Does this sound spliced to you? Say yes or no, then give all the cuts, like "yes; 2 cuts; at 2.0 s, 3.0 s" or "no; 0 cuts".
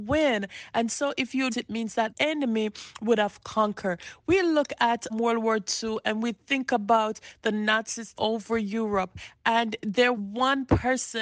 yes; 5 cuts; at 1.5 s, 2.1 s, 5.1 s, 8.1 s, 10.1 s